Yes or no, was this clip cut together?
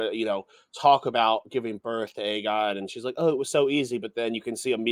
no